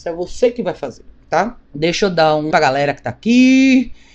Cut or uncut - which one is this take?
cut